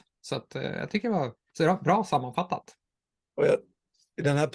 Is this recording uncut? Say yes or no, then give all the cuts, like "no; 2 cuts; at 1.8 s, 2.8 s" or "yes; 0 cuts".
yes; 0 cuts